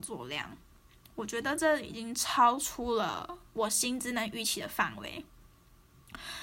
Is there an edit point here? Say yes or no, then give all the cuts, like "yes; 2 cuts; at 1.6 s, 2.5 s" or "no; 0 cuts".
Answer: yes; 1 cut; at 3.5 s